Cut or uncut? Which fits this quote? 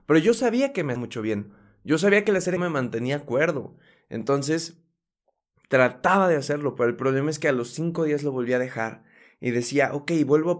cut